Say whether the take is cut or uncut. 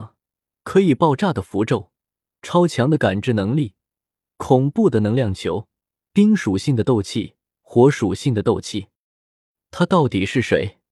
uncut